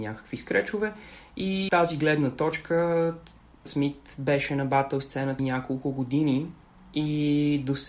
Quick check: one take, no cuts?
no; 3 cuts; at 1.7 s, 3.6 s, 5.4 s

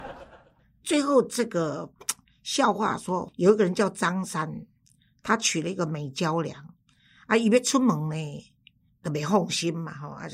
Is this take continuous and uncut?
yes; 0 cuts

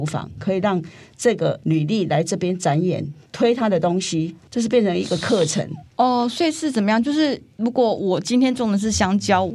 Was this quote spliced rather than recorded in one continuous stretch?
no; 0 cuts

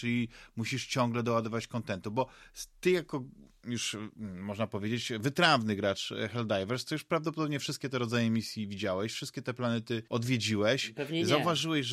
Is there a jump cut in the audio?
yes; 1 cut; at 10.1 s

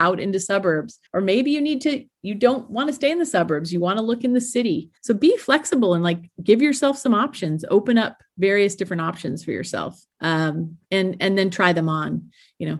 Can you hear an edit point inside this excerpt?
yes; 3 cuts; at 1.1 s, 5.0 s, 10.1 s

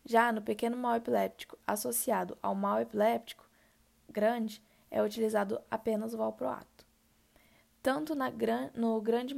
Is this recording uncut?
yes; 0 cuts

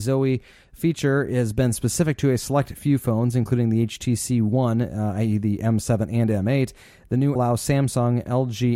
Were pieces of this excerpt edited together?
yes; 1 cut; at 7.4 s

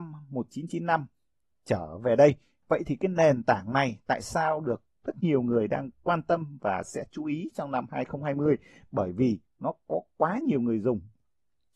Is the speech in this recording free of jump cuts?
yes; 0 cuts

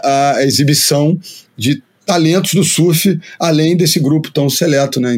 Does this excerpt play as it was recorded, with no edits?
yes; 0 cuts

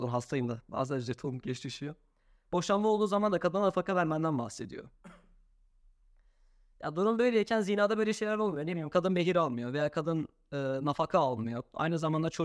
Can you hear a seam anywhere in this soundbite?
no; 0 cuts

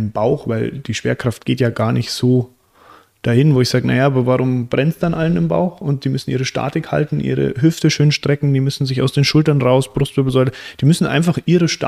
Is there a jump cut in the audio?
no; 0 cuts

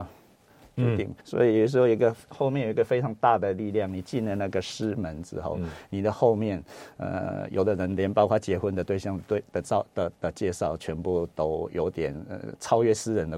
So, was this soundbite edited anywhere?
yes; 1 cut; at 1.2 s

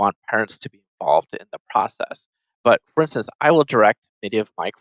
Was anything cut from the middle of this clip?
no; 0 cuts

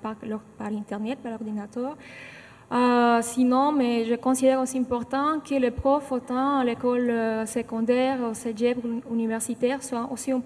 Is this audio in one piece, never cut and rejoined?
yes; 0 cuts

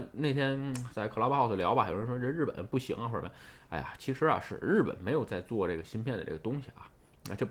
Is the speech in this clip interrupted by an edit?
no; 0 cuts

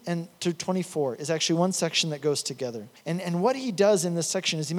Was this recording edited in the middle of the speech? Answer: no; 0 cuts

